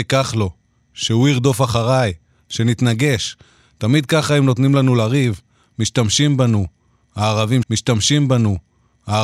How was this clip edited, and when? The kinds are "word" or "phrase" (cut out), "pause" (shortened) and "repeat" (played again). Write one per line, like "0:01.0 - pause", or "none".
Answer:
0:07.6 - repeat